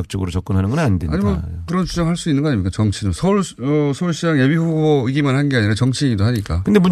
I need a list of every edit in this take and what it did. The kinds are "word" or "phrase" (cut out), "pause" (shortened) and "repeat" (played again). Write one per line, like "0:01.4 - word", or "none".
0:01.7 - word

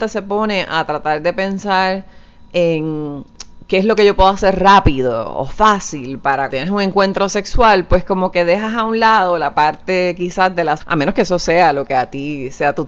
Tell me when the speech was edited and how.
0:06.5 - word
0:10.8 - word

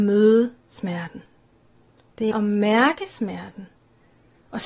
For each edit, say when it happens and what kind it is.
0:02.3 - word

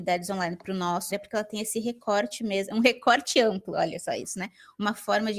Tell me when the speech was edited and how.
0:01.1 - word

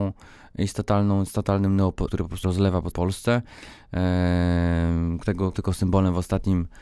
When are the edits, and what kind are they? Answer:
0:02.1 - word
0:02.4 - word
0:02.9 - word
0:05.5 - word

